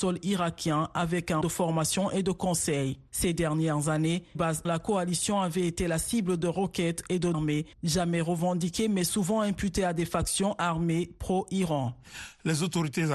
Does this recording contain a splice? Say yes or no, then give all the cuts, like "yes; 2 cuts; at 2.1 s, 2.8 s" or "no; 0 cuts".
yes; 5 cuts; at 1.4 s, 4.3 s, 4.6 s, 7.3 s, 7.7 s